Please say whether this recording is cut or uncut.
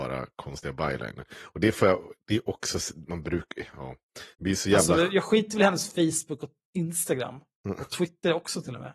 cut